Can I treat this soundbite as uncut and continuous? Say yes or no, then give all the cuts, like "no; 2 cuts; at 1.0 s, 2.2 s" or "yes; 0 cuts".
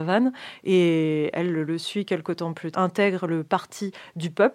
no; 1 cut; at 2.7 s